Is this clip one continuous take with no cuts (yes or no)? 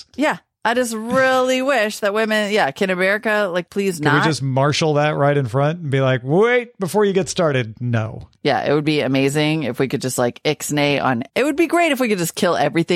no